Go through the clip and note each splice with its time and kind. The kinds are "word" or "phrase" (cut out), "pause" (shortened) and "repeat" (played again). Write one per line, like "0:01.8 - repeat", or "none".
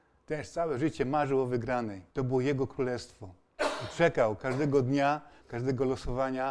0:02.1 - pause